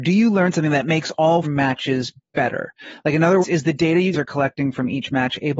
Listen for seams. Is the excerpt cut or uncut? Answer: cut